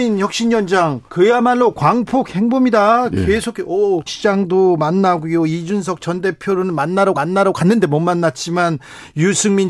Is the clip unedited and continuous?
no; 3 cuts; at 1.1 s, 4.1 s, 7.1 s

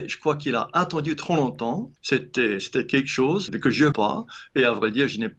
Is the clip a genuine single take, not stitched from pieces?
no; 3 cuts; at 2.0 s, 3.5 s, 3.9 s

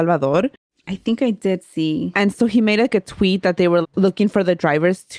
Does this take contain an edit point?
yes; 1 cut; at 3.8 s

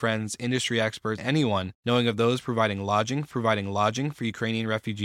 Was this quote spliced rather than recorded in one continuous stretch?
yes; 3 cuts; at 1.2 s, 1.8 s, 3.3 s

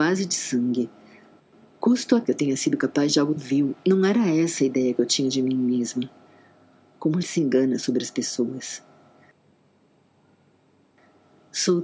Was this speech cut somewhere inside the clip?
yes; 3 cuts; at 2.2 s, 3.4 s, 7.2 s

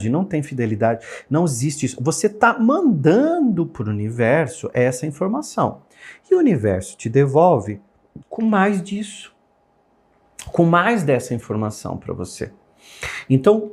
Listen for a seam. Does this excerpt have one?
yes; 1 cut; at 8.2 s

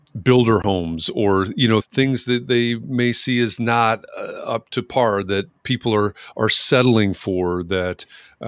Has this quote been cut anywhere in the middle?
yes; 1 cut; at 1.8 s

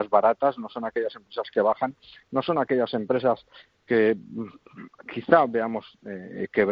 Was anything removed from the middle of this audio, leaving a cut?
no; 0 cuts

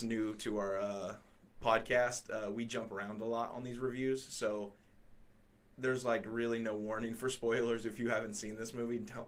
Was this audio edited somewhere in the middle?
no; 0 cuts

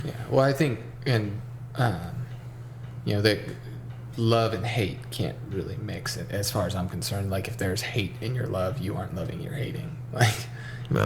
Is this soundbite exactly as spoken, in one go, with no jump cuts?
yes; 0 cuts

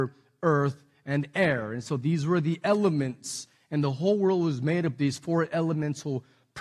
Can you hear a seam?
no; 0 cuts

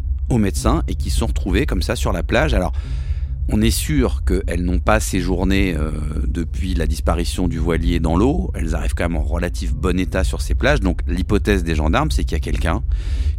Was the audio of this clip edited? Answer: no; 0 cuts

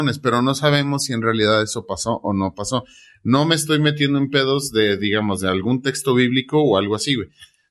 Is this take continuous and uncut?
yes; 0 cuts

